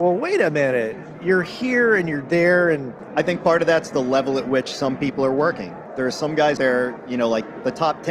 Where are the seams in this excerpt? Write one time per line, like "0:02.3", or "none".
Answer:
0:06.6